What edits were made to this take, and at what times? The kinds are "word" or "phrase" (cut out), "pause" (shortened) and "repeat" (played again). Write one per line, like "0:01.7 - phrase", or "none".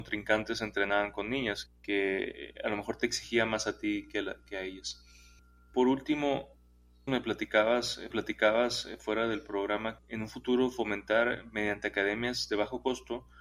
0:01.7 - word
0:07.1 - phrase
0:08.1 - repeat
0:10.0 - word